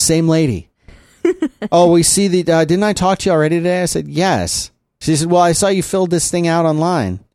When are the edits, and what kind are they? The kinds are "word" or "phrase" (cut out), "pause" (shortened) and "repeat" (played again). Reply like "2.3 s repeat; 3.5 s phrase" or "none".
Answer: none